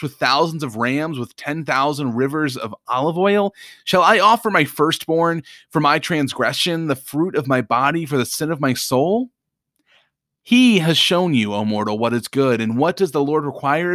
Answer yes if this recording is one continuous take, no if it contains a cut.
yes